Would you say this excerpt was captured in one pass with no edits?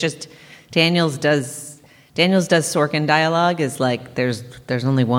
yes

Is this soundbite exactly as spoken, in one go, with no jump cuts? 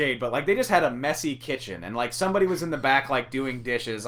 yes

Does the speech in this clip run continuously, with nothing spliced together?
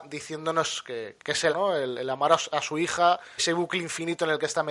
no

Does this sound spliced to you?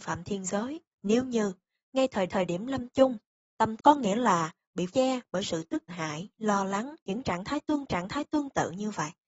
yes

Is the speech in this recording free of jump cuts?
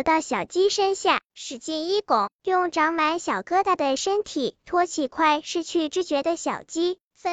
yes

